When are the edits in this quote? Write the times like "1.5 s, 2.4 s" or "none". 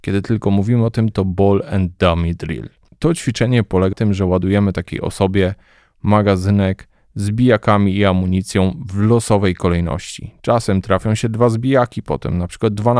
1.1 s, 3.9 s